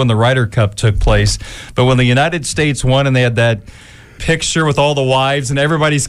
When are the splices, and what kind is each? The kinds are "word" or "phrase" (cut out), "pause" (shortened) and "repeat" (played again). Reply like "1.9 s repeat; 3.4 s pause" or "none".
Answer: 4.2 s word